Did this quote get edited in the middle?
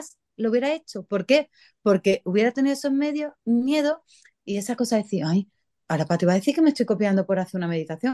no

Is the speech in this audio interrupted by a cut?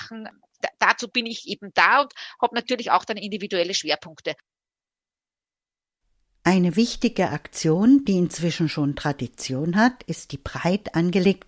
no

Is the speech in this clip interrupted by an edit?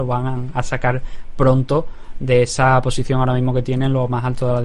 no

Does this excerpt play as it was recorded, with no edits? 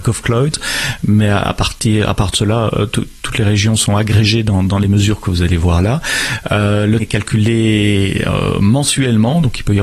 no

